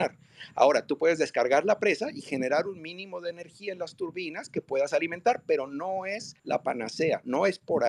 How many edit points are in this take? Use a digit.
1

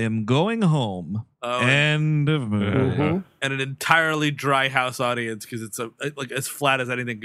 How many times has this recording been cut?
1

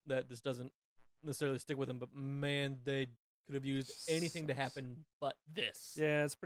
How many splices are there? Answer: 0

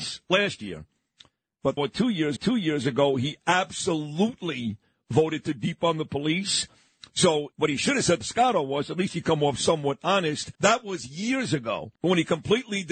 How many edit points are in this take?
6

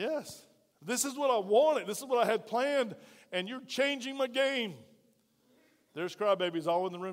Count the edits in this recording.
0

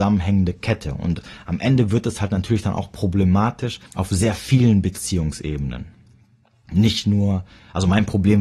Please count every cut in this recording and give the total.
1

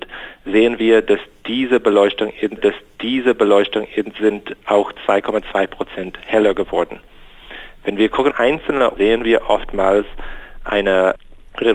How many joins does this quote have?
3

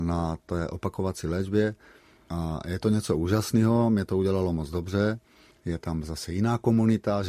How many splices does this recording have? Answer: 0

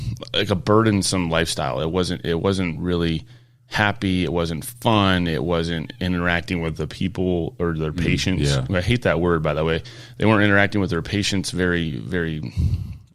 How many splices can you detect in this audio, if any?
0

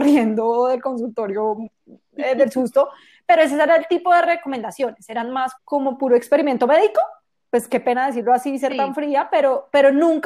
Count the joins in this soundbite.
1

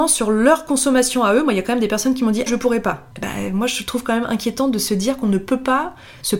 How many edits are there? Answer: 2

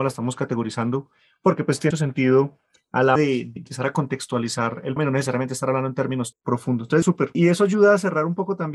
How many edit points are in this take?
5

